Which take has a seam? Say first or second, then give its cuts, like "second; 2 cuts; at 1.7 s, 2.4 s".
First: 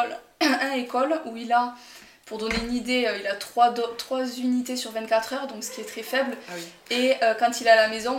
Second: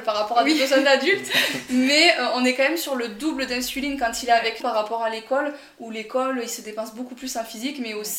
second; 1 cut; at 4.6 s